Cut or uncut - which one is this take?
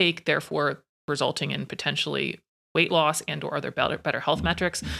uncut